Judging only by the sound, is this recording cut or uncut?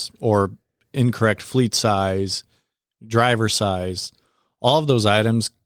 uncut